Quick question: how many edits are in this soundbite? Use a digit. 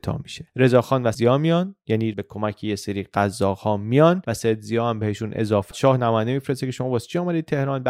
3